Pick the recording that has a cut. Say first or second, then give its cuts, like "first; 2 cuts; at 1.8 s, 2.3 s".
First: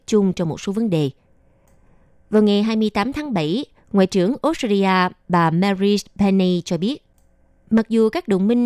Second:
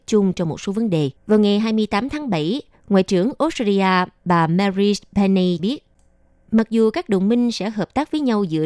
second; 2 cuts; at 1.2 s, 5.6 s